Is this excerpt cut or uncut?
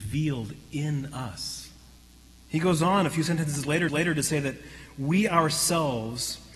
cut